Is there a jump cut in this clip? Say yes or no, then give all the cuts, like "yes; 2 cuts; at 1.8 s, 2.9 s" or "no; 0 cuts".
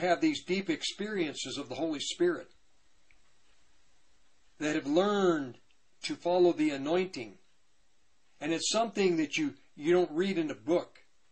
no; 0 cuts